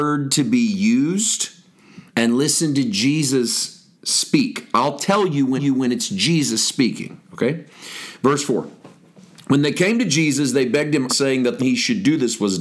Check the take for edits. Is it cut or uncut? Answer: cut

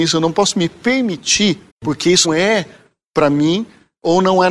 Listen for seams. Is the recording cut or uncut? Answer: cut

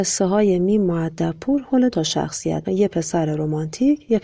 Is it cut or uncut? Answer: cut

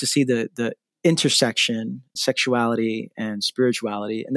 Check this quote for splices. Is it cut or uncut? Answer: cut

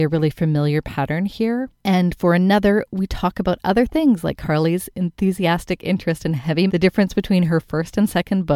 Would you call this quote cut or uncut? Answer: cut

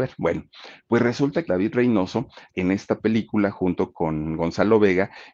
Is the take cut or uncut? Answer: cut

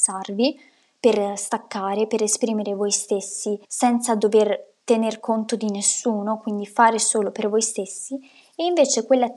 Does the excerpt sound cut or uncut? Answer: cut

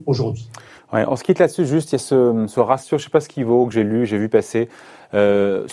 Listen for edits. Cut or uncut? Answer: uncut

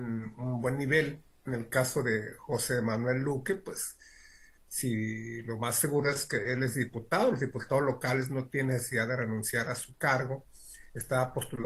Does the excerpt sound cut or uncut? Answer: uncut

